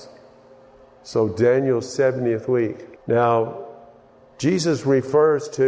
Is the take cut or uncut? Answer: cut